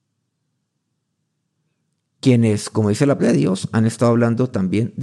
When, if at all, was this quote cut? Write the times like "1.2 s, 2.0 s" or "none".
3.2 s